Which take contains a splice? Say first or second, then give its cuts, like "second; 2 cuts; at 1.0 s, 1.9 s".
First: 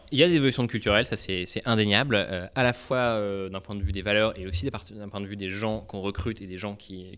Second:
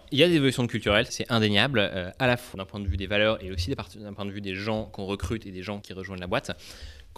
second; 3 cuts; at 1.1 s, 2.5 s, 5.8 s